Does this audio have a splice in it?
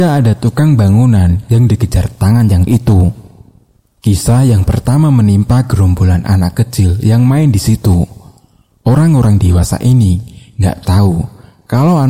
yes; 1 cut; at 2.7 s

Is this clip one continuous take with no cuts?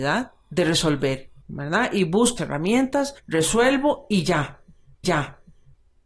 no; 4 cuts; at 1.4 s, 2.4 s, 3.2 s, 5.0 s

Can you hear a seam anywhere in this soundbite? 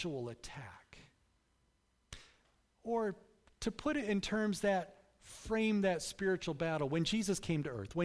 no; 0 cuts

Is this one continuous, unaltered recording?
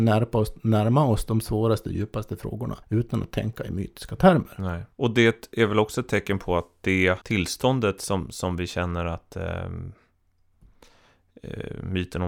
no; 3 cuts; at 2.8 s, 4.9 s, 7.2 s

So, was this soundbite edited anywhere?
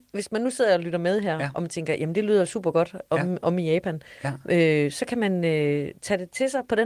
no; 0 cuts

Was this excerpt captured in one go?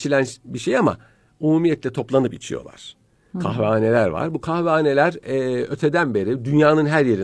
yes; 0 cuts

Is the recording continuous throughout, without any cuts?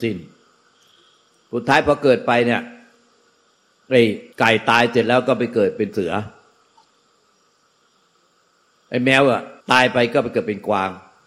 no; 2 cuts; at 4.3 s, 9.6 s

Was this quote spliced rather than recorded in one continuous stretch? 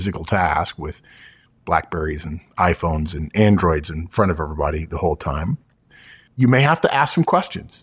no; 0 cuts

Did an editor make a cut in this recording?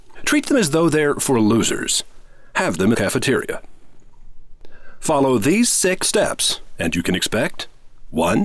yes; 2 cuts; at 2.9 s, 6.0 s

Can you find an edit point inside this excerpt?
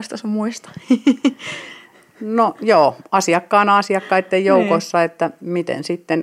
no; 0 cuts

